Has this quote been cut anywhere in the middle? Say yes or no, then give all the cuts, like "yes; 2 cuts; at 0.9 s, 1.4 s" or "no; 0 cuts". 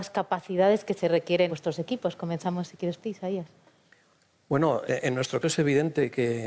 yes; 4 cuts; at 1.5 s, 3.0 s, 4.9 s, 5.4 s